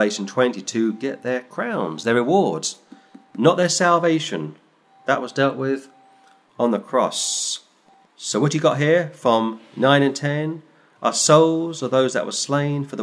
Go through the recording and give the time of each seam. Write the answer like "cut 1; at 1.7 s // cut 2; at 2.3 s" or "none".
none

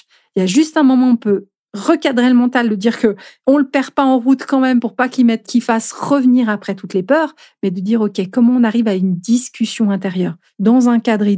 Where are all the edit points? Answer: cut 1; at 5.4 s

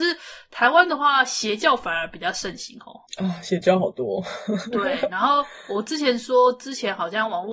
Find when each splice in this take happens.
cut 1; at 3.1 s

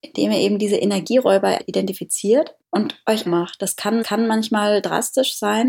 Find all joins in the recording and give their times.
cut 1; at 1.6 s // cut 2; at 2.6 s // cut 3; at 3.3 s // cut 4; at 4.0 s

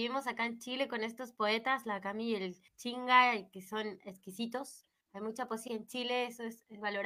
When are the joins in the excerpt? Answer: cut 1; at 2.7 s // cut 2; at 5.0 s // cut 3; at 5.7 s

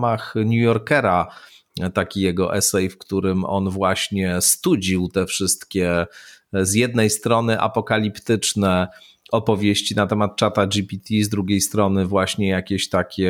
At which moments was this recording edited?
none

